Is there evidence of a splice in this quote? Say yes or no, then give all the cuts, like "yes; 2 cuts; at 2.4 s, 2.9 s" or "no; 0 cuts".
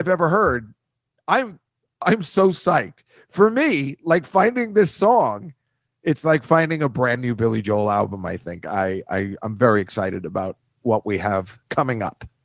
no; 0 cuts